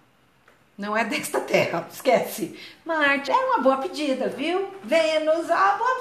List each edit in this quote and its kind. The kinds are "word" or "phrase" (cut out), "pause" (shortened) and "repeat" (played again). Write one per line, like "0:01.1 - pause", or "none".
0:03.3 - word